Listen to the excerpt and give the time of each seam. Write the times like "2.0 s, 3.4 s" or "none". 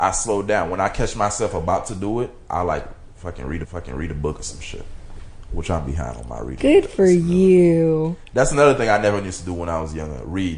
3.6 s